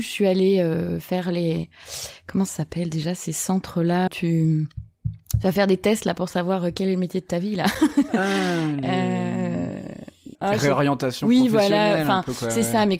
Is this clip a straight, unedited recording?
no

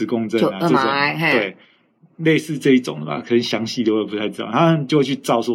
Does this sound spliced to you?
no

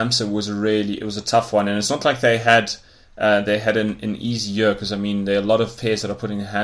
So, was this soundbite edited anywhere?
no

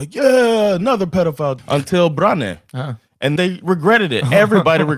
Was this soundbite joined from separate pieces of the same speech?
yes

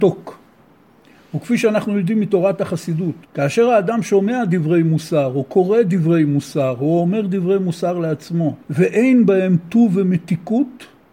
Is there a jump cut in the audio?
yes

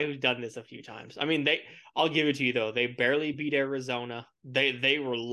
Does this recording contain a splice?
no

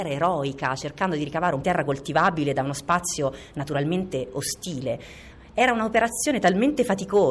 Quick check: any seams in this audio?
yes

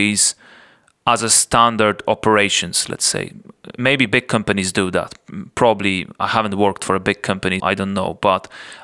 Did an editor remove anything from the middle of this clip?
yes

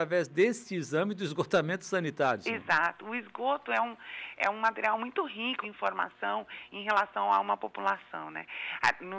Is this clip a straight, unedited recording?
no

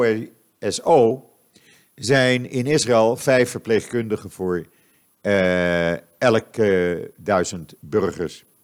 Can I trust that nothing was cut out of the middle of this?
yes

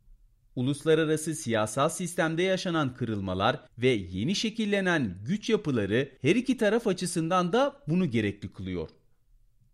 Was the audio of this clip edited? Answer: yes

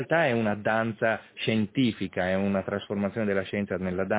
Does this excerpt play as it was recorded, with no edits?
yes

